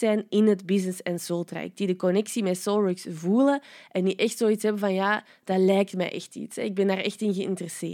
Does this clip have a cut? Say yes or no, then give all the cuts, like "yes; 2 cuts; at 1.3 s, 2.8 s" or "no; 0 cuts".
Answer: no; 0 cuts